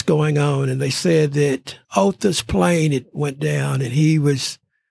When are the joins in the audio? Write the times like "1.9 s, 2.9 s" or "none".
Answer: 1.8 s